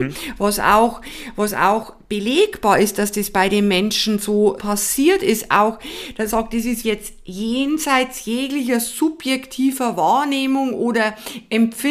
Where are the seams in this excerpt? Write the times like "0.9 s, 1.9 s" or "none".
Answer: 4.6 s, 6.3 s, 6.8 s